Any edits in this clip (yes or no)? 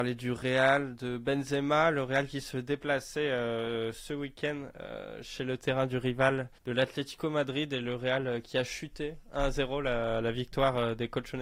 yes